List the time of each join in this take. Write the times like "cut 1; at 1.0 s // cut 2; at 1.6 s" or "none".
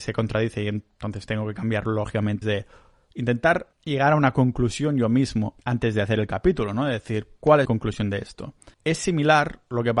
cut 1; at 2.4 s // cut 2; at 3.7 s // cut 3; at 5.6 s // cut 4; at 7.7 s // cut 5; at 8.7 s